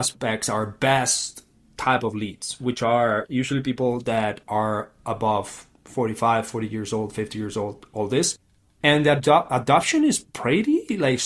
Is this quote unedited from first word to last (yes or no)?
yes